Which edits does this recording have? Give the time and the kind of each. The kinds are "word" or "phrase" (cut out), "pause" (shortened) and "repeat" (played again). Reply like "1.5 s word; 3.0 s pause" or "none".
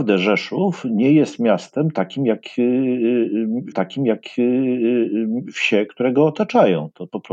3.7 s repeat